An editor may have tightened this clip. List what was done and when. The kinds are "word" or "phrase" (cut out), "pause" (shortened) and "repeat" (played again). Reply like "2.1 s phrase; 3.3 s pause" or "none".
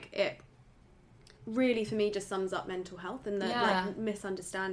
none